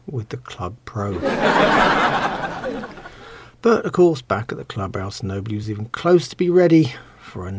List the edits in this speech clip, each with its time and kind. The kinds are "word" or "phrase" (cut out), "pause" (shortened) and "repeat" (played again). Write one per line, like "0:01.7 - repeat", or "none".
none